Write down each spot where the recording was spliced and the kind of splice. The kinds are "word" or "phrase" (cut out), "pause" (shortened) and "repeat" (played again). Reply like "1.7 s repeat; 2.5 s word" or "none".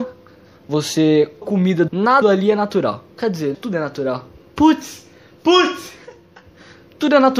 1.4 s word; 1.9 s word; 2.2 s word; 3.1 s pause; 3.5 s phrase